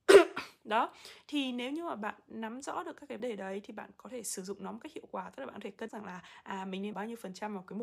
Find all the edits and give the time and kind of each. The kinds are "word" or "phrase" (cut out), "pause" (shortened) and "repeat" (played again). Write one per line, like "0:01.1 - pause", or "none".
0:03.2 - word
0:05.9 - word
0:06.9 - word